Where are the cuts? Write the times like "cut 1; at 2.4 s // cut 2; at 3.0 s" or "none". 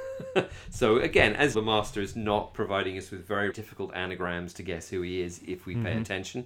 cut 1; at 1.5 s // cut 2; at 3.5 s